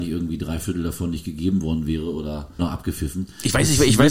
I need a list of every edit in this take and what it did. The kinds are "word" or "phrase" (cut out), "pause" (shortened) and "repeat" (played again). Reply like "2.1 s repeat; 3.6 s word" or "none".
2.6 s word